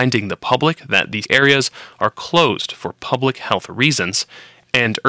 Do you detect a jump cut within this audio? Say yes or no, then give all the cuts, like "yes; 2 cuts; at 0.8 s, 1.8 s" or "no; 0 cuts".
yes; 1 cut; at 1.2 s